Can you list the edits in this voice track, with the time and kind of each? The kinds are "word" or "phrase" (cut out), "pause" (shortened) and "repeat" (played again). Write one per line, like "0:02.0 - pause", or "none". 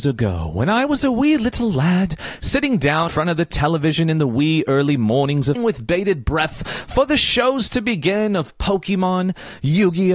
0:03.1 - word
0:05.6 - phrase